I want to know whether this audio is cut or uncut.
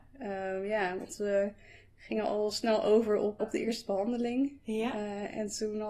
cut